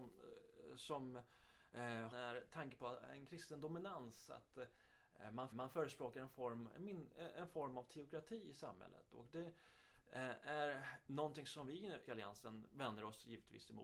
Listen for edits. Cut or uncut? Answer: cut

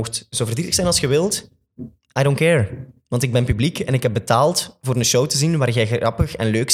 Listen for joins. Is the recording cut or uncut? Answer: uncut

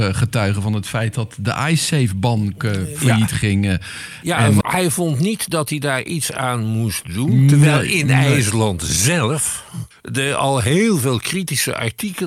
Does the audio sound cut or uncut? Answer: cut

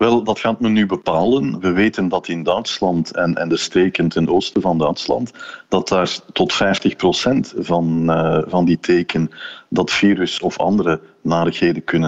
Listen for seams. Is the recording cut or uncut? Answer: uncut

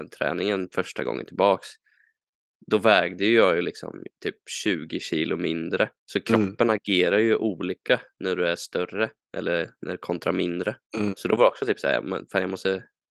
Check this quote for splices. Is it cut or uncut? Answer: cut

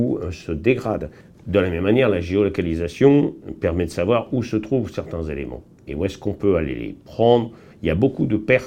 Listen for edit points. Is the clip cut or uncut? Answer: uncut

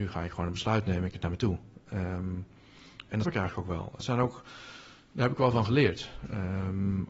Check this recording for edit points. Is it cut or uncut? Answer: cut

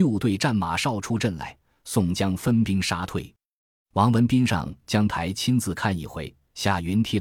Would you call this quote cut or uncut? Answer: uncut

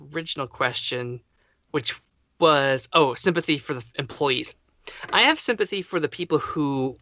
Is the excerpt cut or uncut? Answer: uncut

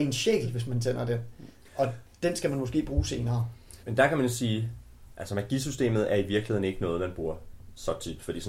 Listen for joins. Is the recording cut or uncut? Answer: cut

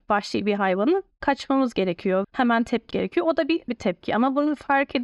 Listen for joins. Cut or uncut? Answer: cut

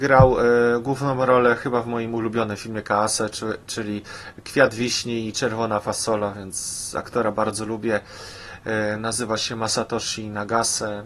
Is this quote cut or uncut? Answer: uncut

